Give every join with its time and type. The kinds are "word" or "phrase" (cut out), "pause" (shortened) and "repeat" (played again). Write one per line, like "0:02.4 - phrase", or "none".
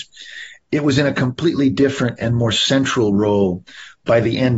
none